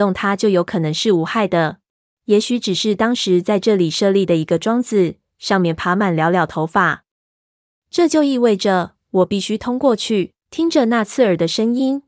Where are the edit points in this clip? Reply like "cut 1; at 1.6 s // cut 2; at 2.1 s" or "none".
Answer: cut 1; at 2.1 s // cut 2; at 10.4 s